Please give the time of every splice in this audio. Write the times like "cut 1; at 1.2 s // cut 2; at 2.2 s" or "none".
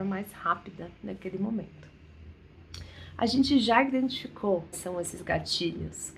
cut 1; at 4.7 s